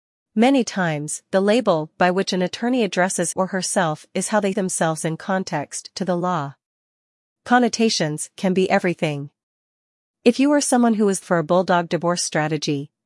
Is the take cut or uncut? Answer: cut